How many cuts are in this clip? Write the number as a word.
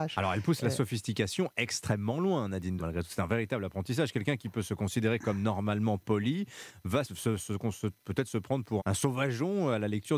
four